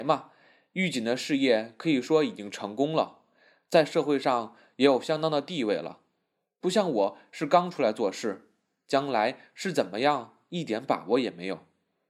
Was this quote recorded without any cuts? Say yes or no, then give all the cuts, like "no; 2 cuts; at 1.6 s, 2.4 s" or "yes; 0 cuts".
yes; 0 cuts